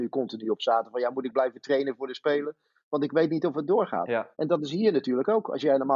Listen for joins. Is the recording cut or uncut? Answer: cut